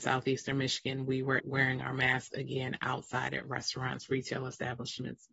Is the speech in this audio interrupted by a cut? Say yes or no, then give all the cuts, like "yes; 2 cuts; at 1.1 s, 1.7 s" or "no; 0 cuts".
yes; 1 cut; at 1.4 s